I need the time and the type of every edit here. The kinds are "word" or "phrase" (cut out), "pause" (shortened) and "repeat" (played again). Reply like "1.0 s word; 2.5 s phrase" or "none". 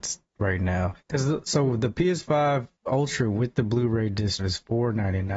1.0 s pause; 2.8 s pause; 4.4 s word